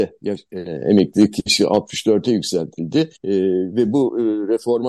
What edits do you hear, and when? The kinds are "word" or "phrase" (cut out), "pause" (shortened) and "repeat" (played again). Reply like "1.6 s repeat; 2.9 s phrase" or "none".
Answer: 3.2 s pause